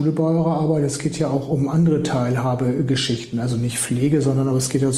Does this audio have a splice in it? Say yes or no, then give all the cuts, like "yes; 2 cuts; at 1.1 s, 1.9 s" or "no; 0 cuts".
no; 0 cuts